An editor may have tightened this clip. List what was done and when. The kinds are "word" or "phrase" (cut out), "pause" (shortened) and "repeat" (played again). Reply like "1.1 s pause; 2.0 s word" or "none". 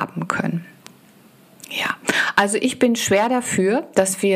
none